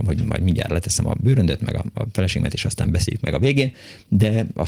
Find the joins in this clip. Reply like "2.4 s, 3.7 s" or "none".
none